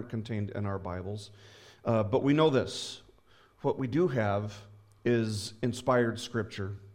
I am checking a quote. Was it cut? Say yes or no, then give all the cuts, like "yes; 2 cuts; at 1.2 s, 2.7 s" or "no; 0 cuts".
no; 0 cuts